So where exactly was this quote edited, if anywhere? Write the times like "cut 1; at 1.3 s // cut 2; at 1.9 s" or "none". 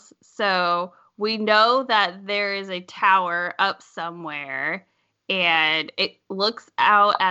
none

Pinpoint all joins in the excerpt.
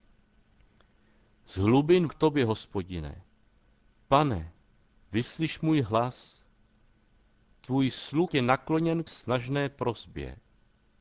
cut 1; at 2.1 s // cut 2; at 8.3 s // cut 3; at 9.1 s

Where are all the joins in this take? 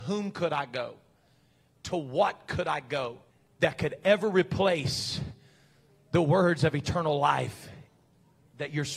cut 1; at 3.3 s

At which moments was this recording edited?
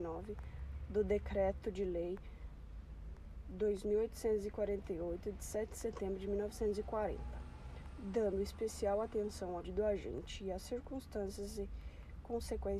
cut 1; at 9.6 s

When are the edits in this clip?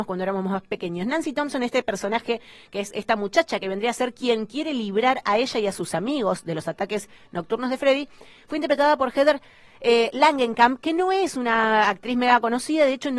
none

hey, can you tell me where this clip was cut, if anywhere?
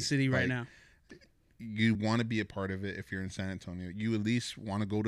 none

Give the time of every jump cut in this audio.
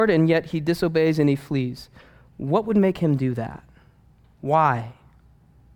none

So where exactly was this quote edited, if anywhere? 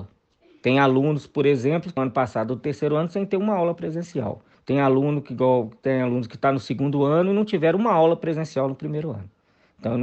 cut 1; at 2.0 s // cut 2; at 4.5 s

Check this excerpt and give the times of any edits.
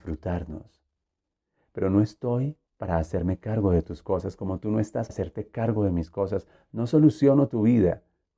cut 1; at 2.7 s // cut 2; at 5.1 s

